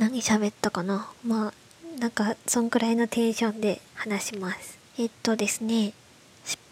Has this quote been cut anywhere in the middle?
yes; 3 cuts; at 1.2 s, 3.9 s, 4.8 s

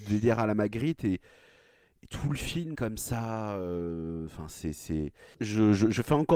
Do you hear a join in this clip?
yes; 1 cut; at 2.7 s

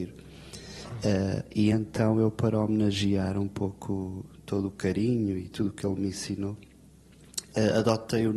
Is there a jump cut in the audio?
no; 0 cuts

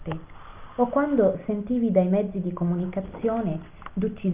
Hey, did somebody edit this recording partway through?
no; 0 cuts

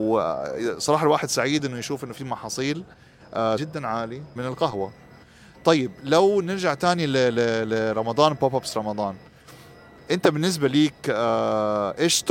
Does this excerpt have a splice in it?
yes; 2 cuts; at 3.6 s, 4.4 s

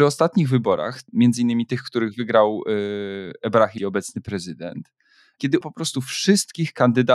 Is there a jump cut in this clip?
yes; 2 cuts; at 3.8 s, 5.6 s

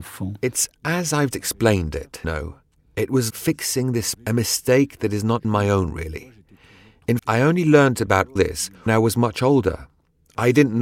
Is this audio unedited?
no; 8 cuts; at 1.3 s, 2.2 s, 3.3 s, 4.1 s, 5.4 s, 7.2 s, 8.4 s, 8.9 s

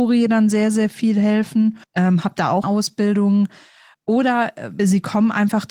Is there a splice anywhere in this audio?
yes; 3 cuts; at 1.8 s, 2.6 s, 4.8 s

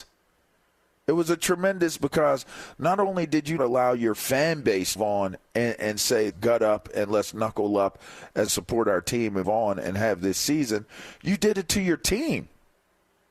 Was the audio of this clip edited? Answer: yes; 6 cuts; at 2.0 s, 3.6 s, 5.0 s, 6.3 s, 8.5 s, 9.4 s

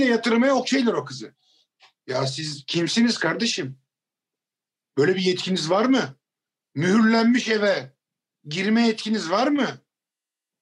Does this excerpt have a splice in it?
no; 0 cuts

